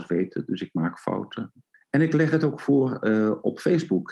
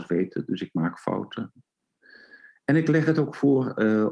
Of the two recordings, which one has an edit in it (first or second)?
first